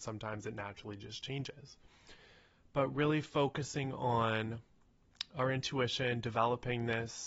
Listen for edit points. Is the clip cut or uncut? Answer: uncut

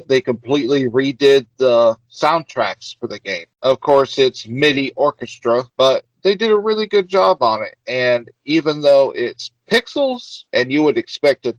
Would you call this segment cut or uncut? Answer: cut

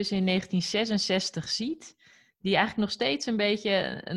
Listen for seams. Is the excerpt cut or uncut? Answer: uncut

